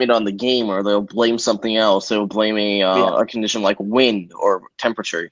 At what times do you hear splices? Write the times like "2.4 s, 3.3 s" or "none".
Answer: none